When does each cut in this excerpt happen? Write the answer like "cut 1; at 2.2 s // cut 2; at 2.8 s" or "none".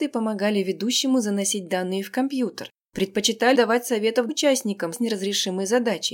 cut 1; at 3.5 s // cut 2; at 4.3 s // cut 3; at 4.9 s